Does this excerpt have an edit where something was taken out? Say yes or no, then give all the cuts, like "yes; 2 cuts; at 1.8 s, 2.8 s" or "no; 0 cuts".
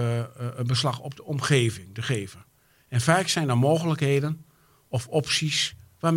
no; 0 cuts